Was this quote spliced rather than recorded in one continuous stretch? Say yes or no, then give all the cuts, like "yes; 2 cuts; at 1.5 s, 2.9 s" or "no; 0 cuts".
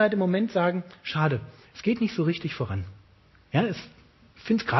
no; 0 cuts